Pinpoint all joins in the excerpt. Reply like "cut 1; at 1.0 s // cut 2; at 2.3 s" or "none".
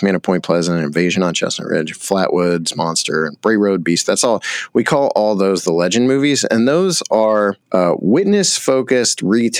cut 1; at 7.6 s